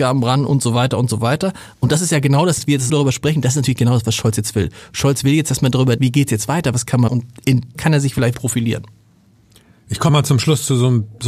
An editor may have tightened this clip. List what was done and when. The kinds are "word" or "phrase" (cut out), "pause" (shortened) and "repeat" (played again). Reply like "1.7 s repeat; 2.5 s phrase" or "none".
2.6 s word; 2.9 s word; 6.0 s word; 7.1 s word; 7.7 s word; 8.3 s word; 10.1 s word